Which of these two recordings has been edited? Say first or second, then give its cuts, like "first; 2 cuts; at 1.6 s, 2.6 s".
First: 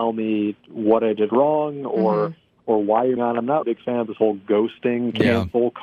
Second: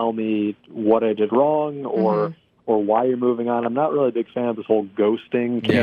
first; 2 cuts; at 3.2 s, 3.6 s